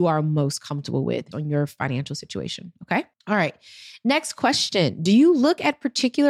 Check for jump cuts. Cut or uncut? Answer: cut